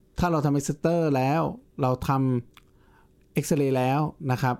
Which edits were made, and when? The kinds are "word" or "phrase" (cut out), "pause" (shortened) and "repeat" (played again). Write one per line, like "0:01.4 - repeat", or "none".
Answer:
0:02.5 - pause